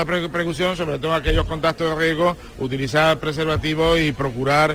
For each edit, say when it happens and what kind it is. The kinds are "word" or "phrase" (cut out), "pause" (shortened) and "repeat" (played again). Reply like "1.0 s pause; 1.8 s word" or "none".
none